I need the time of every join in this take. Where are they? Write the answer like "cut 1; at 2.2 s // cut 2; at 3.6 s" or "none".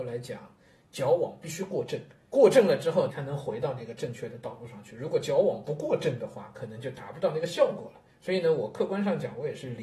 cut 1; at 2.3 s // cut 2; at 3.1 s // cut 3; at 8.1 s